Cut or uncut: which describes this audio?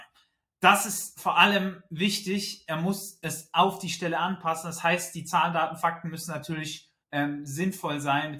cut